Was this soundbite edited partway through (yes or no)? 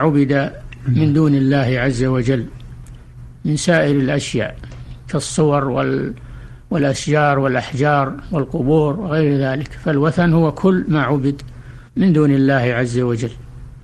yes